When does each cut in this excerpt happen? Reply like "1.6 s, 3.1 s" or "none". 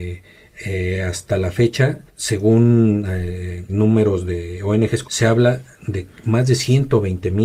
2.1 s, 3.7 s, 5.0 s